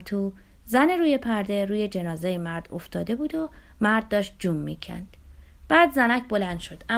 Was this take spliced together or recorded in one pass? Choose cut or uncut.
uncut